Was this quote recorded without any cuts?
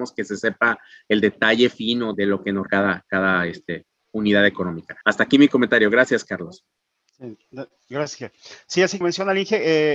no; 4 cuts; at 2.1 s, 2.7 s, 5.0 s, 9.0 s

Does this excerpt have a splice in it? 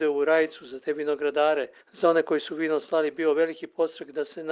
yes; 1 cut; at 1.8 s

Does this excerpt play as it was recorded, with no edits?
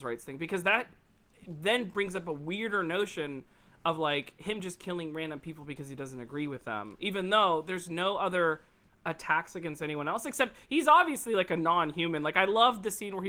yes; 0 cuts

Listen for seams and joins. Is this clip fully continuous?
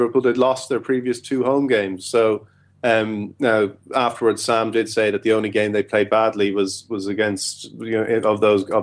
yes; 0 cuts

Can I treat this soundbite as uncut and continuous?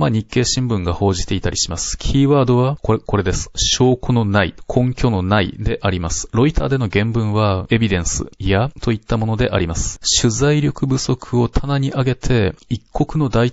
no; 3 cuts; at 3.0 s, 7.6 s, 8.7 s

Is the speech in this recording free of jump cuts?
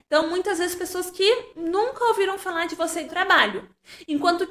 no; 1 cut; at 3.1 s

